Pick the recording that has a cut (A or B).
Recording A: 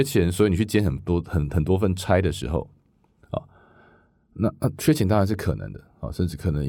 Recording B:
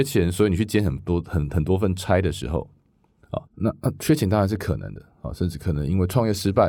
B